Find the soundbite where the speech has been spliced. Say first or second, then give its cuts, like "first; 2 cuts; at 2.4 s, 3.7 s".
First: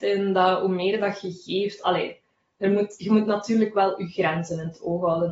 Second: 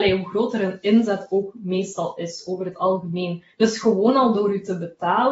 second; 1 cut; at 3.5 s